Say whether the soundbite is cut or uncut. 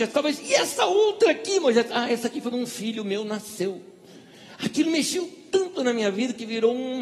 cut